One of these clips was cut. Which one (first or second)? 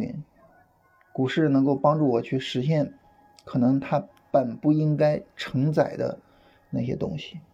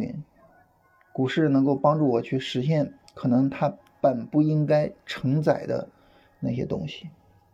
second